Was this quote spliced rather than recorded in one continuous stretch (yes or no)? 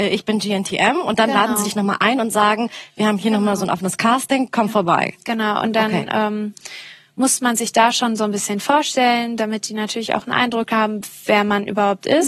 no